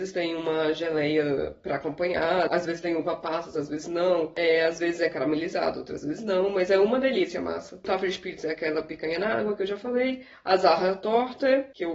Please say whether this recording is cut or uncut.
cut